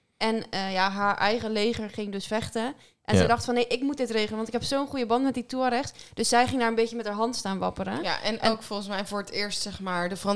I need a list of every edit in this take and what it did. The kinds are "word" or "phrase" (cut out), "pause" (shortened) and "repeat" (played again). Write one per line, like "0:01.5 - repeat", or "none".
none

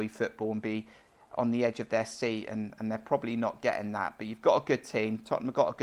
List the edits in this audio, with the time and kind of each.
none

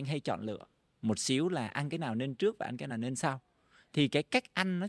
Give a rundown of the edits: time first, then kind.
none

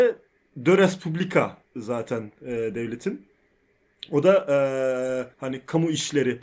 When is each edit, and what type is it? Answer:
0:01.6 - pause
0:05.3 - pause

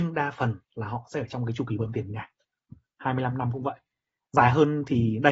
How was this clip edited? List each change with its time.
none

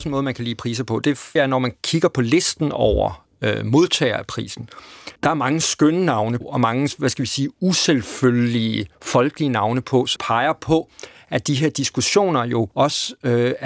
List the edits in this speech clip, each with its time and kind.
0:01.4 - word
0:05.2 - pause
0:06.4 - word
0:08.9 - pause
0:10.2 - word
0:12.7 - pause

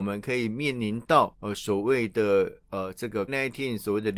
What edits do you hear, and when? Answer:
0:01.3 - pause
0:03.3 - word

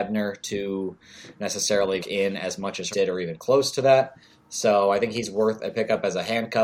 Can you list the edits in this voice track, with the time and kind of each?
0:02.0 - word
0:02.9 - word

